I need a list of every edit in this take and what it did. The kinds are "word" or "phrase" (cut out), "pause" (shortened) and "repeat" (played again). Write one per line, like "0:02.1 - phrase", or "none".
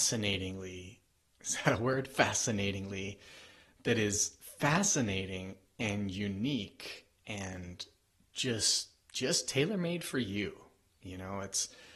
none